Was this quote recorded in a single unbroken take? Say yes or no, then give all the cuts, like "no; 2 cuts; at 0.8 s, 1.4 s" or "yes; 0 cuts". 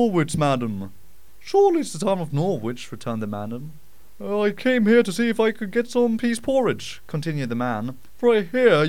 yes; 0 cuts